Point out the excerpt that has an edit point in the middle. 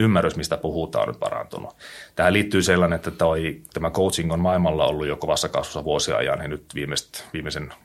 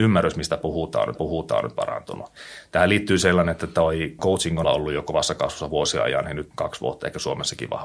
second; 4 cuts; at 1.1 s, 4.2 s, 4.6 s, 6.5 s

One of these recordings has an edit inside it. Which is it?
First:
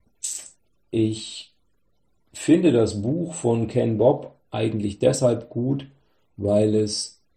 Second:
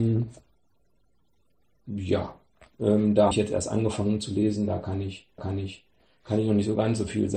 second; 2 cuts; at 3.3 s, 5.4 s

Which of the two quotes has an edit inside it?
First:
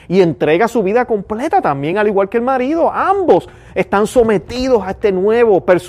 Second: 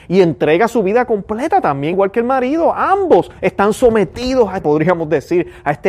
second; 3 cuts; at 1.9 s, 3.4 s, 4.6 s

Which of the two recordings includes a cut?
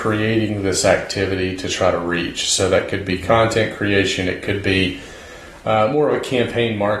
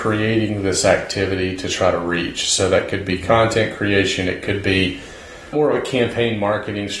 second; 1 cut; at 5.5 s

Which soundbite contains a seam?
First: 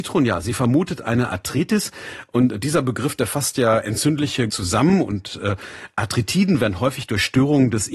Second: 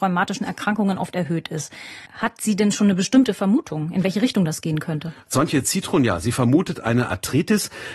first; 1 cut; at 4.5 s

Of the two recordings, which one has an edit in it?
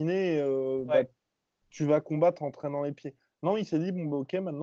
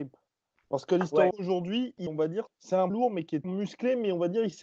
second; 5 cuts; at 1.3 s, 2.1 s, 2.5 s, 2.9 s, 3.4 s

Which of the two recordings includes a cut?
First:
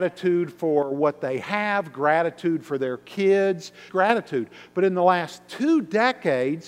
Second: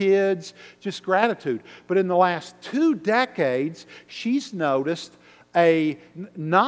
first; 1 cut; at 3.9 s

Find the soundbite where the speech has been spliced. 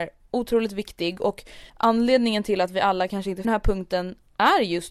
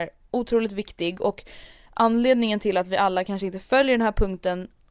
first; 2 cuts; at 1.7 s, 3.4 s

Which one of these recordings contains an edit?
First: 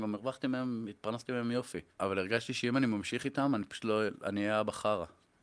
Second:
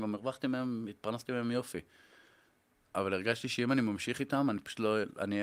first; 1 cut; at 1.9 s

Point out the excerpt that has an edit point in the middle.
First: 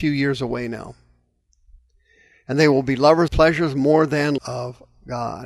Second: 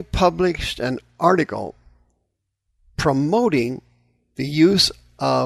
first; 2 cuts; at 3.3 s, 4.4 s

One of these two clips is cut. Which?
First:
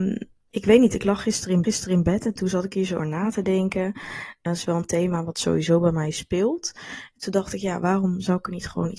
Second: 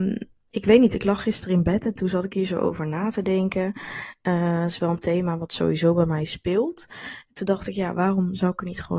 first; 3 cuts; at 1.6 s, 3.0 s, 4.5 s

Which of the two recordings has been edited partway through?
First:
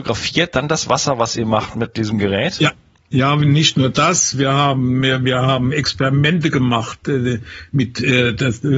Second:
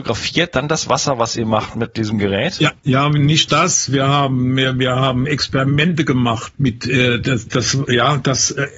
second; 4 cuts; at 2.8 s, 3.5 s, 6.5 s, 7.5 s

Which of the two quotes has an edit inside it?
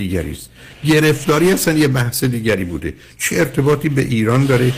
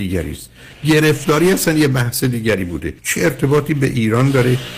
second; 1 cut; at 3.0 s

